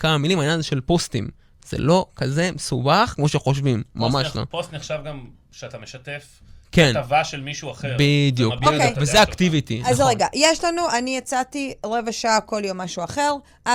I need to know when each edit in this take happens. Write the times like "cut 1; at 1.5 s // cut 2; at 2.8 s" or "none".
none

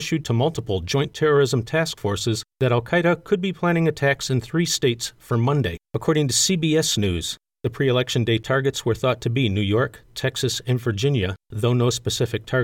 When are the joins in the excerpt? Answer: cut 1; at 2.5 s // cut 2; at 5.8 s // cut 3; at 11.4 s

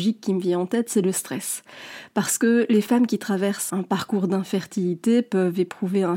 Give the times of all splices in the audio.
cut 1; at 3.7 s

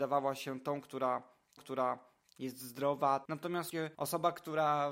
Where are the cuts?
cut 1; at 1.6 s // cut 2; at 3.9 s

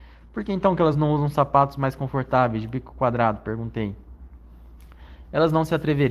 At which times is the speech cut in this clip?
none

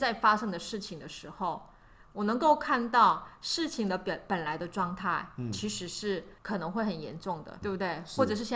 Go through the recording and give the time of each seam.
cut 1; at 6.4 s // cut 2; at 7.6 s

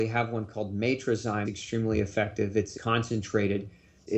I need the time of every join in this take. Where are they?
cut 1; at 1.5 s // cut 2; at 2.7 s

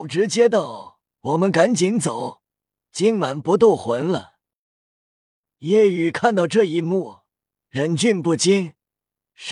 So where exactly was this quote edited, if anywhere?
none

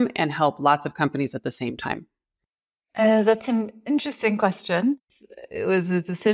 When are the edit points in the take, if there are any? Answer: none

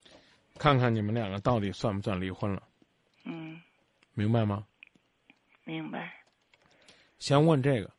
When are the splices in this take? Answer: none

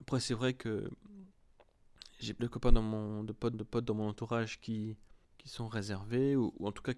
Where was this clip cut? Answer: cut 1; at 2.4 s // cut 2; at 3.5 s // cut 3; at 5.2 s

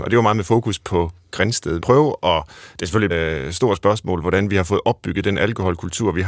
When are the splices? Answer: cut 1; at 1.8 s // cut 2; at 3.1 s

